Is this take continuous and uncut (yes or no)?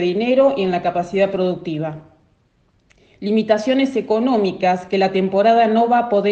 yes